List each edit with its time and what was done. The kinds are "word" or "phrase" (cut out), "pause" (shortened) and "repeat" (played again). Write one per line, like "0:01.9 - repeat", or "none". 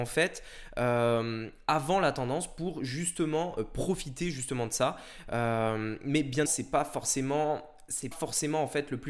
0:06.5 - word
0:08.1 - word